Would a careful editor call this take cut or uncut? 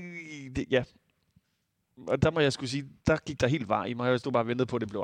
cut